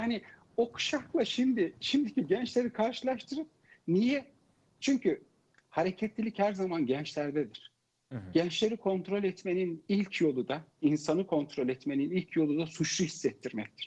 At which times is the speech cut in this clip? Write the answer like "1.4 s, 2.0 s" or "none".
10.7 s